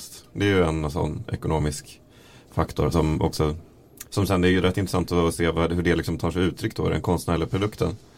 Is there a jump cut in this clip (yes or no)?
yes